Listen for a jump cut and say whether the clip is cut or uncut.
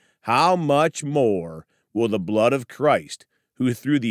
uncut